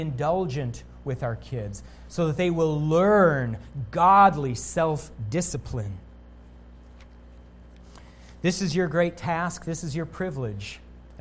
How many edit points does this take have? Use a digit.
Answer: 0